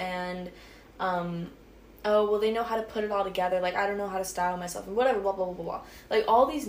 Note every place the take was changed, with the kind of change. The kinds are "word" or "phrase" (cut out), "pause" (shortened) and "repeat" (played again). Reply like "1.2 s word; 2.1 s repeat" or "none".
none